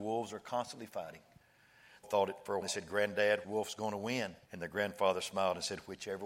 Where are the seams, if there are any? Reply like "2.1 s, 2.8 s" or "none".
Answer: 2.0 s, 2.6 s, 3.4 s, 4.4 s